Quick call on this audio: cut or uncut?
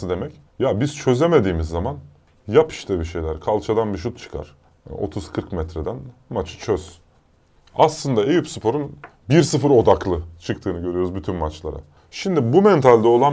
uncut